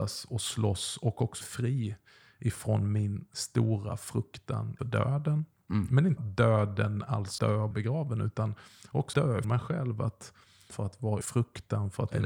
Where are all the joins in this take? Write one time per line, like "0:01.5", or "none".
0:01.4
0:04.8
0:06.2
0:07.4
0:07.7
0:09.1
0:09.4
0:10.7
0:11.2